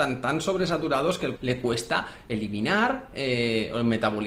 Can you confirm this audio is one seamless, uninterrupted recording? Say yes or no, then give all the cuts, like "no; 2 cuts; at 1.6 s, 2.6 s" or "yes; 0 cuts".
no; 1 cut; at 1.4 s